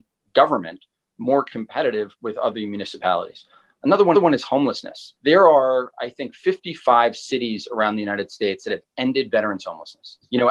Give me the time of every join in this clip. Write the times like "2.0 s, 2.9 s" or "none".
4.1 s, 5.2 s